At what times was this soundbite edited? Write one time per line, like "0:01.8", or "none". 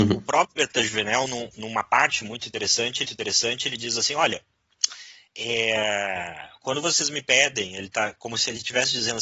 0:03.0

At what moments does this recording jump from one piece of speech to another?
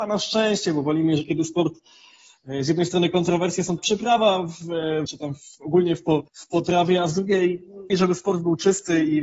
0:03.8
0:05.1
0:05.5
0:06.3
0:07.9

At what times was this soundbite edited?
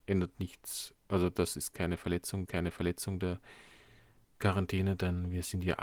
0:01.0
0:02.5

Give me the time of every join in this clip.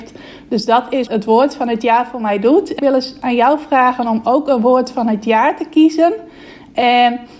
0:01.1
0:02.8

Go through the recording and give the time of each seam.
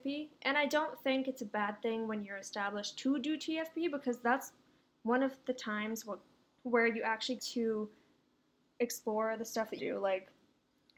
0:07.4
0:09.8

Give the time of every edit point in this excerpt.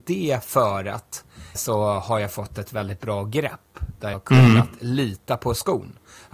0:01.6
0:04.1

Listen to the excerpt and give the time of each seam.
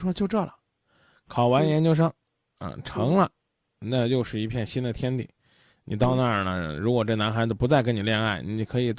none

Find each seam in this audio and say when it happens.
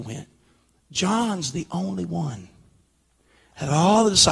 none

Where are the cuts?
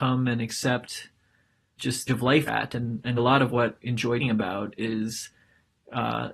0:01.8
0:02.1
0:02.5
0:03.2
0:03.8
0:04.2

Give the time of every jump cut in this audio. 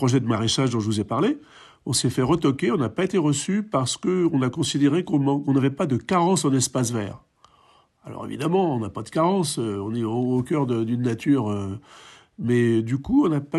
none

